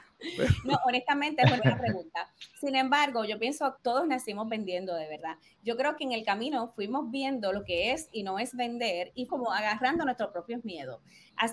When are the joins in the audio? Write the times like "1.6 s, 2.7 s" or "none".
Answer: 1.6 s, 3.8 s, 6.0 s, 9.3 s